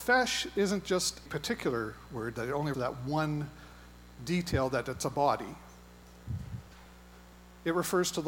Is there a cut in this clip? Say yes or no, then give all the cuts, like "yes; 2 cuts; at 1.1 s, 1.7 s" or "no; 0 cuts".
yes; 2 cuts; at 1.3 s, 2.7 s